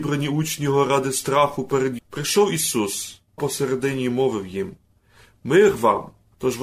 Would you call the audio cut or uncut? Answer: cut